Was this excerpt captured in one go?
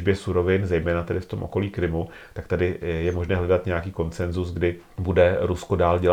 yes; 0 cuts

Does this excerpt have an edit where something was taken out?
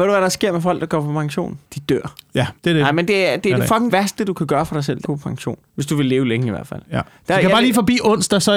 yes; 6 cuts; at 1.7 s, 2.6 s, 3.1 s, 3.9 s, 5.0 s, 5.6 s

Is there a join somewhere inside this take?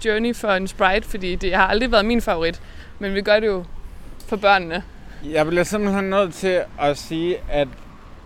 no; 0 cuts

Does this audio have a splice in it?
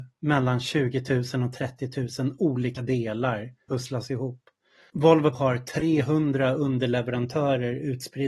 yes; 2 cuts; at 3.7 s, 5.3 s

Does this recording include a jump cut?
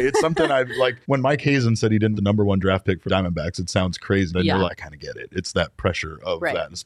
yes; 5 cuts; at 1.0 s, 2.2 s, 3.1 s, 4.3 s, 4.7 s

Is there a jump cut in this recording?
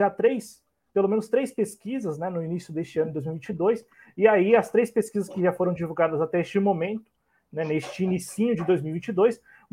no; 0 cuts

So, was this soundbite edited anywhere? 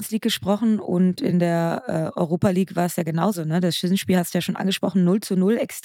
no; 0 cuts

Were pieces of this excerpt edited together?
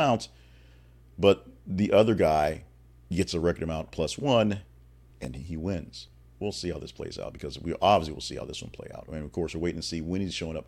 no; 0 cuts

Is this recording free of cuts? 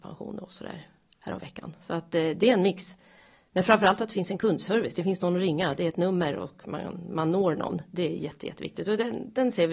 yes; 0 cuts

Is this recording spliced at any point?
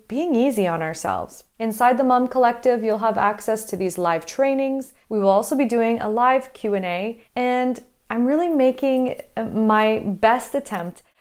yes; 3 cuts; at 1.5 s, 5.0 s, 7.3 s

